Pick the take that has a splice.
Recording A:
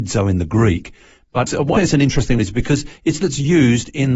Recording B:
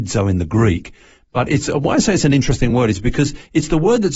A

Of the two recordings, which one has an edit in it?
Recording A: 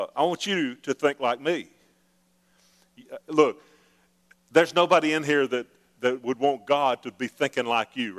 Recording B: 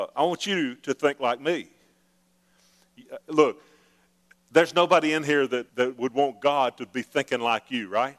B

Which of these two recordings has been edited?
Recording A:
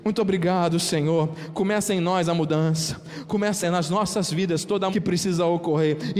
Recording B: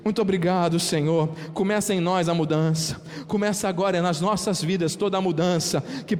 A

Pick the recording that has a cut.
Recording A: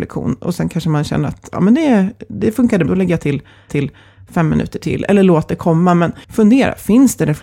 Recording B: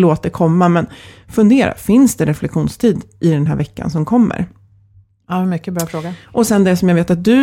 A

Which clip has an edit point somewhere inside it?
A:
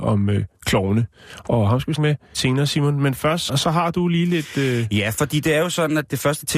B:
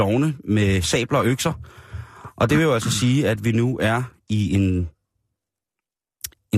A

